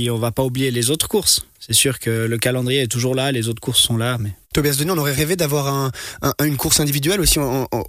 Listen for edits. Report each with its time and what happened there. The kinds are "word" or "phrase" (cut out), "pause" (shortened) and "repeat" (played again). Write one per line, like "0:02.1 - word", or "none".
0:04.4 - pause